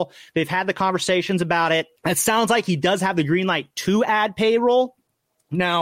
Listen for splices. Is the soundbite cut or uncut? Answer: cut